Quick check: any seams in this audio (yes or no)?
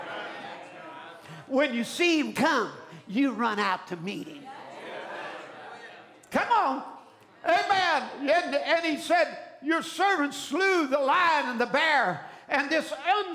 no